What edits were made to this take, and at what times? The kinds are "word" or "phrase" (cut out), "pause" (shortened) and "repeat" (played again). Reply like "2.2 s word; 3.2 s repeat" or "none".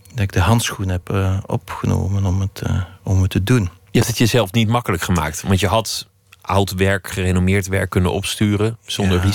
none